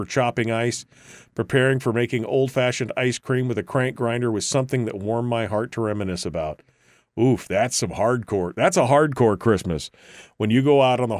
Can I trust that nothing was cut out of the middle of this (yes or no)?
yes